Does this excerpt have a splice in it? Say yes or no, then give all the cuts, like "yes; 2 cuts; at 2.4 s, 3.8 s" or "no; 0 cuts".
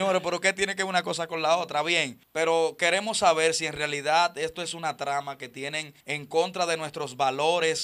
yes; 2 cuts; at 2.2 s, 6.0 s